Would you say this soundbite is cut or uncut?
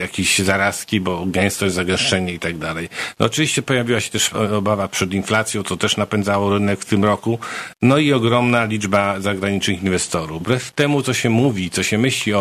cut